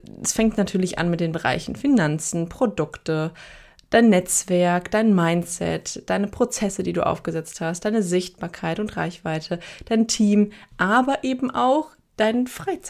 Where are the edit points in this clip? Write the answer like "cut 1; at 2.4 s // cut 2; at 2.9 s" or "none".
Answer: none